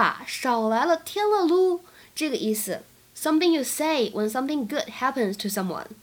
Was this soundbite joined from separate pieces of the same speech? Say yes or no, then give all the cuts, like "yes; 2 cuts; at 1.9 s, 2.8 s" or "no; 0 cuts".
no; 0 cuts